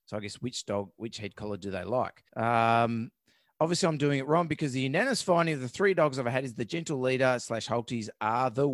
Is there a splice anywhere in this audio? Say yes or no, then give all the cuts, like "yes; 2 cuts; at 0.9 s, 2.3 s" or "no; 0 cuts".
yes; 1 cut; at 2.3 s